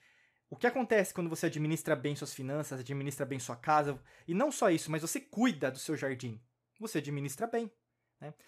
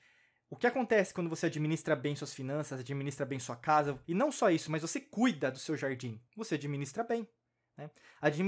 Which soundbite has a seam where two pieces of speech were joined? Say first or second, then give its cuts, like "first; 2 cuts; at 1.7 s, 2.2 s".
second; 2 cuts; at 4.0 s, 6.3 s